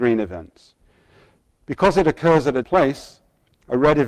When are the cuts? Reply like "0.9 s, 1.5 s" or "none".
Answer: 2.6 s